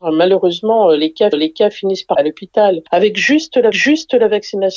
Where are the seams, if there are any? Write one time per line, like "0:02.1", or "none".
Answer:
0:01.3
0:02.1
0:03.7